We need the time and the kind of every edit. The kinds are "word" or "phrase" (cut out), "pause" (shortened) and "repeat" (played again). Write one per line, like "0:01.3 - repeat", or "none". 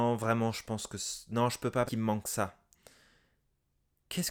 0:01.9 - word